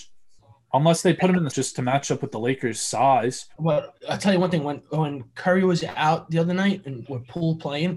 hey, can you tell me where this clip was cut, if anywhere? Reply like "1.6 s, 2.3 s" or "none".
1.5 s, 3.5 s, 7.0 s